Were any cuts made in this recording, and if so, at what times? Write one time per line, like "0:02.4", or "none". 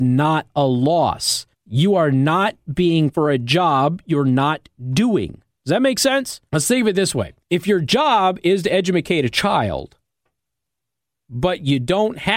0:01.5
0:03.1
0:06.5
0:07.4